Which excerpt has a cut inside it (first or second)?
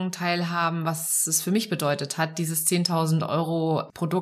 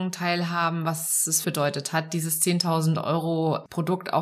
second